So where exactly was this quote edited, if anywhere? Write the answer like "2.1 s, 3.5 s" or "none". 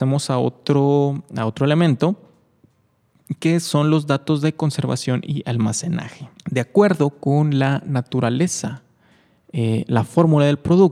6.4 s

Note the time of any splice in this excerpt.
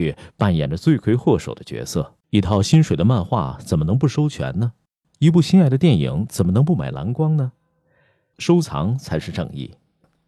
2.2 s

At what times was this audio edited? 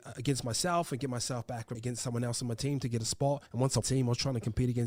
1.7 s, 3.5 s, 3.8 s

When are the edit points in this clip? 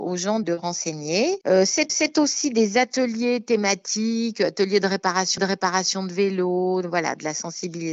1.9 s, 5.4 s

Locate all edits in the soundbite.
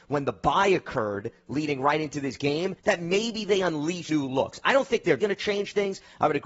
2.8 s, 4.1 s, 5.2 s

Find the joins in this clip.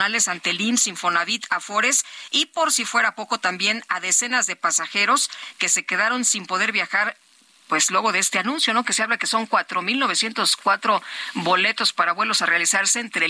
none

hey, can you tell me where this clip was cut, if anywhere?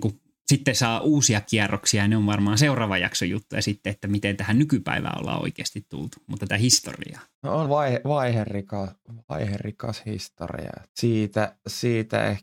6.5 s, 7.7 s, 10.9 s

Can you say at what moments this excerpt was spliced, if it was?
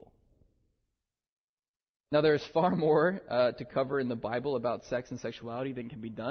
none

